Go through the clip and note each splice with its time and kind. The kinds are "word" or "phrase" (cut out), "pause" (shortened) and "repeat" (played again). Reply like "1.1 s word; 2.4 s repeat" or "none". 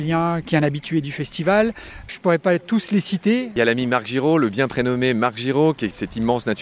none